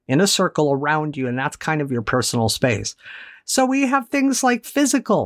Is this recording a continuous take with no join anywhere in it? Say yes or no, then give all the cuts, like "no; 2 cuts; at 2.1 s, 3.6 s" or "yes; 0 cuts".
yes; 0 cuts